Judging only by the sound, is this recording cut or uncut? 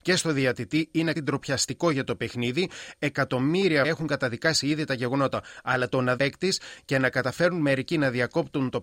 cut